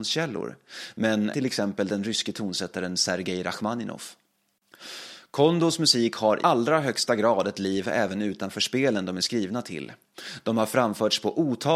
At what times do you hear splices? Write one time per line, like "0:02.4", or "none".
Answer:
0:01.3
0:06.4